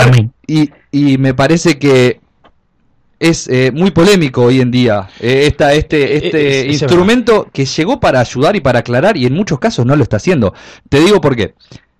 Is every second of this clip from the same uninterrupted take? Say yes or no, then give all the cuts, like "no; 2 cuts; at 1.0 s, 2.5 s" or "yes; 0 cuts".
yes; 0 cuts